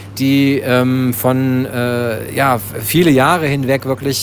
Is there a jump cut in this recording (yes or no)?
no